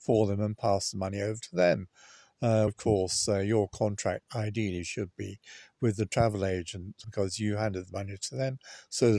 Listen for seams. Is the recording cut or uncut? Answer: cut